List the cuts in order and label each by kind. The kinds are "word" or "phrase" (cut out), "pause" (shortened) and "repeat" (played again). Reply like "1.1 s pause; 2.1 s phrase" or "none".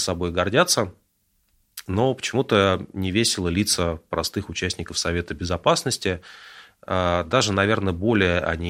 none